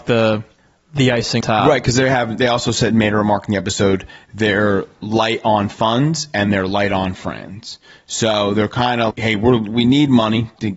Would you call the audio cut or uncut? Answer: cut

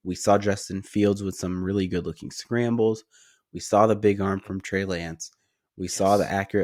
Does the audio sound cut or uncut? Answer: uncut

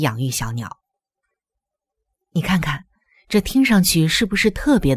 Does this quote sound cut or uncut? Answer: uncut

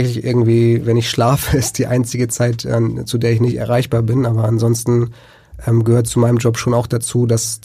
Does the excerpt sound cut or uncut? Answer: uncut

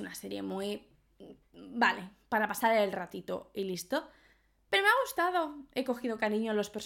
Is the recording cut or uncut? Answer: uncut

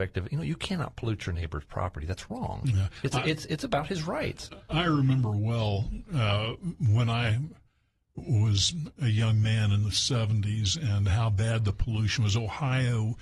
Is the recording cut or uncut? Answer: uncut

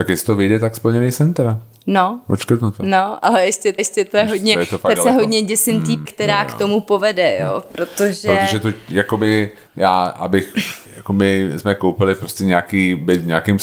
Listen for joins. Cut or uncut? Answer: cut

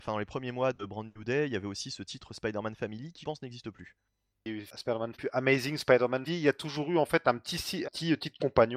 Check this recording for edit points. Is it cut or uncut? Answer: cut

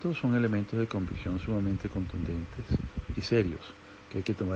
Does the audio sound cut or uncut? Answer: uncut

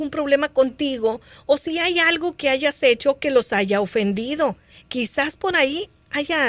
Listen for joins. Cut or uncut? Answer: uncut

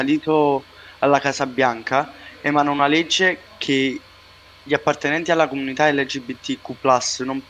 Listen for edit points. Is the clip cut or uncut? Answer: uncut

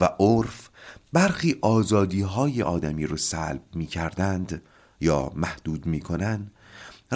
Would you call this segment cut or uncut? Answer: uncut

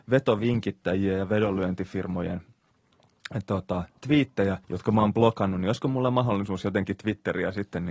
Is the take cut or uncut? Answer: cut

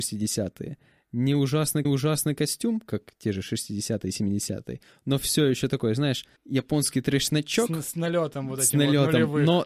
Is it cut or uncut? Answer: cut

